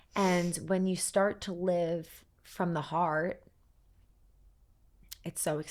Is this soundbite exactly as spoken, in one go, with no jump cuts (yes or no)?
no